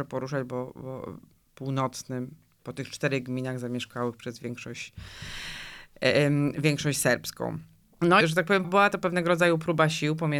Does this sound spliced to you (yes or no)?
yes